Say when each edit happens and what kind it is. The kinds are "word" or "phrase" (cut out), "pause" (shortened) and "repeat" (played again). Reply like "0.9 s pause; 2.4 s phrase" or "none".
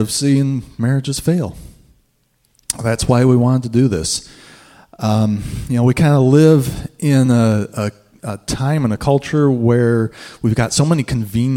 none